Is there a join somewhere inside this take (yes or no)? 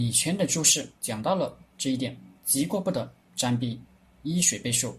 yes